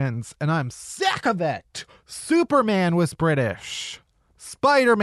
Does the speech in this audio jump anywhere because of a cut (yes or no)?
no